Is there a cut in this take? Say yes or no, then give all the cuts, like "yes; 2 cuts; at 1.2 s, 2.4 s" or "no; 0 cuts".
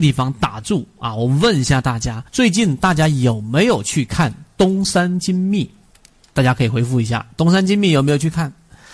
yes; 2 cuts; at 2.3 s, 6.0 s